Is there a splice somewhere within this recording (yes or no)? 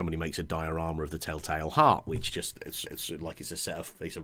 yes